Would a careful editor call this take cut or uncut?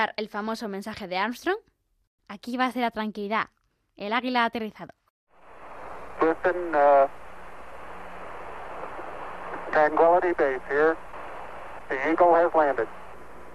uncut